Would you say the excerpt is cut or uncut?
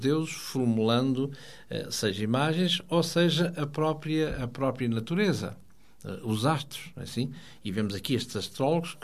uncut